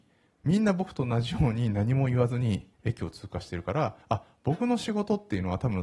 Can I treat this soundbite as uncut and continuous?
no; 2 cuts; at 2.7 s, 4.0 s

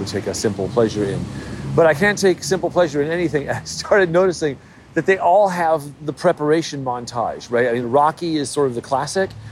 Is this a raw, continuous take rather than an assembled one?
yes; 0 cuts

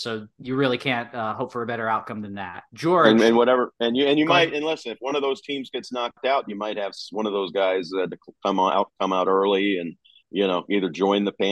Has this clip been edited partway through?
yes; 2 cuts; at 2.7 s, 10.2 s

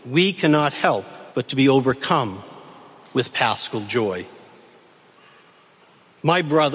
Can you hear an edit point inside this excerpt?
yes; 1 cut; at 1.3 s

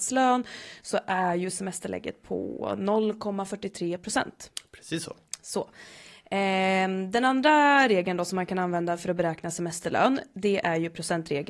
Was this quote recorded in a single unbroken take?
yes; 0 cuts

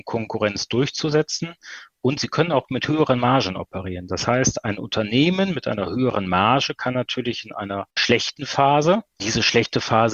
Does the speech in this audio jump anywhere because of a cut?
yes; 1 cut; at 7.9 s

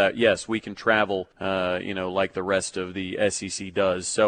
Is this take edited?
yes; 1 cut; at 1.3 s

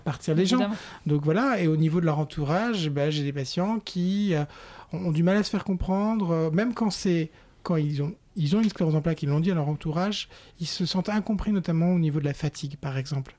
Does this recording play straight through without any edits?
yes; 0 cuts

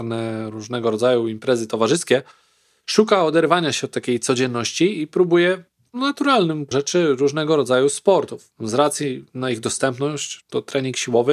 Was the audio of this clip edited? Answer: yes; 1 cut; at 6.7 s

